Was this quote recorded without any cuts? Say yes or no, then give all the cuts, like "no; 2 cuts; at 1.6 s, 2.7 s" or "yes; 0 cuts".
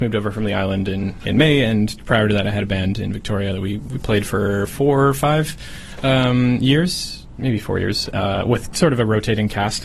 yes; 0 cuts